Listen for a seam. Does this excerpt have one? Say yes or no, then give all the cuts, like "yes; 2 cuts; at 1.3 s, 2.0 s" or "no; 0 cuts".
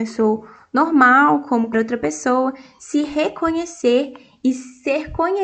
yes; 1 cut; at 1.7 s